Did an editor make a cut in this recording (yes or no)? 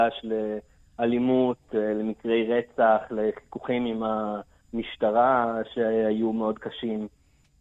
no